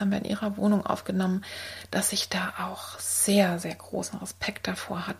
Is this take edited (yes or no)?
no